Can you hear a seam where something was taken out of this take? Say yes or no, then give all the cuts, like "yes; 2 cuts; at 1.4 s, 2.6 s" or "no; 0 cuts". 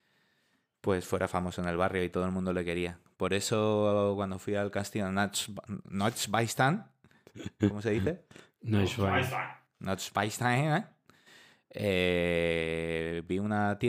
no; 0 cuts